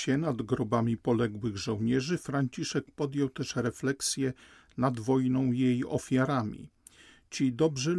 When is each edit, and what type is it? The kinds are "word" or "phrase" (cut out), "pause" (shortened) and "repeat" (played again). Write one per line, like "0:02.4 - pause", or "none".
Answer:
none